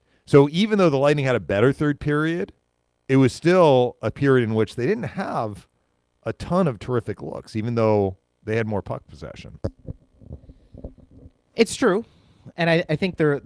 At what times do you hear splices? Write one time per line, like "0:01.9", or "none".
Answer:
none